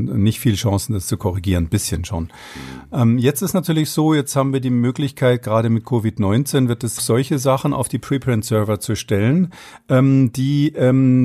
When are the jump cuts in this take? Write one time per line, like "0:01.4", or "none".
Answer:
0:07.0